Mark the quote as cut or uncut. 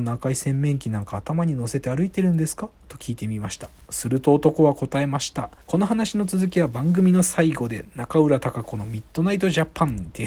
cut